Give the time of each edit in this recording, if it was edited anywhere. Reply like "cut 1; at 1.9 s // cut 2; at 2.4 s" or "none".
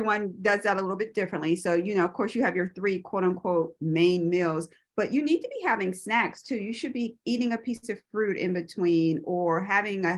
none

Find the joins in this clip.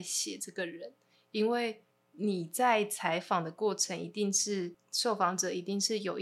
none

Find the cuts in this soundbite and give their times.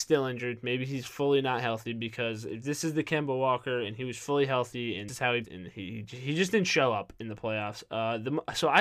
cut 1; at 5.1 s // cut 2; at 5.4 s

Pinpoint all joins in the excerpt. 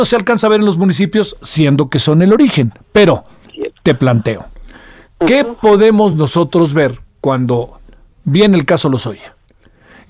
none

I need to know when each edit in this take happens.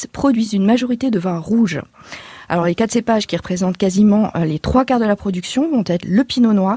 none

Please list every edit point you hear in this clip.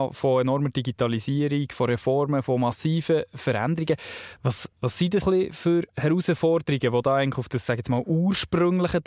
cut 1; at 5.2 s

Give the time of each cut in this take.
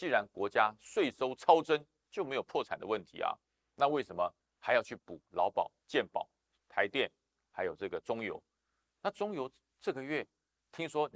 none

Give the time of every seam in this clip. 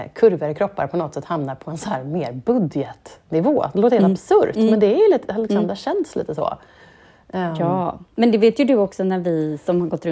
none

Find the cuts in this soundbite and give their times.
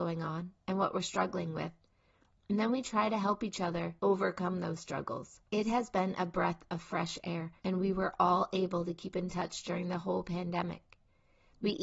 cut 1; at 4.0 s // cut 2; at 5.5 s // cut 3; at 7.6 s

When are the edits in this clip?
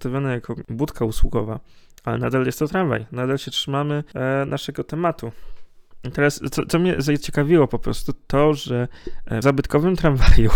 cut 1; at 9.4 s

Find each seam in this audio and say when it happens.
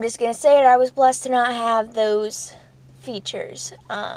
none

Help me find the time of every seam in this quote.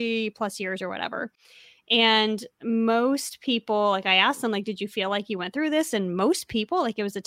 none

